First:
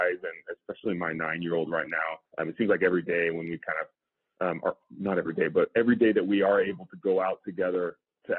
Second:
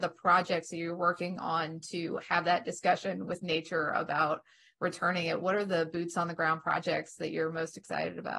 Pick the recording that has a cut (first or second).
first